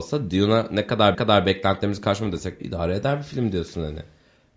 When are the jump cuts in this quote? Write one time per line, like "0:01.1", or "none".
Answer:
0:01.1
0:02.6